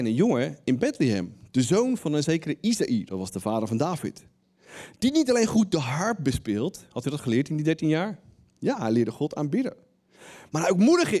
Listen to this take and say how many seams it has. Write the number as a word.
zero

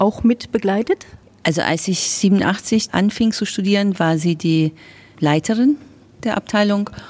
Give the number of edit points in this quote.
one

